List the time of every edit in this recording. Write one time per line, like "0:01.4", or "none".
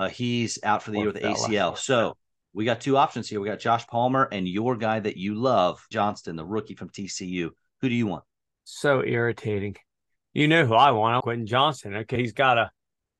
0:03.9
0:05.9
0:11.2
0:12.1